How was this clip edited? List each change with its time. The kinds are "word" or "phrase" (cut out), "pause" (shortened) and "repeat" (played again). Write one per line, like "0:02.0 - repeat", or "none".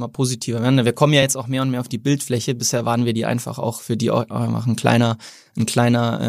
none